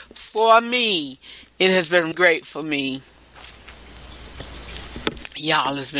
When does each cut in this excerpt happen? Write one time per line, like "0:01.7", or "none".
0:02.1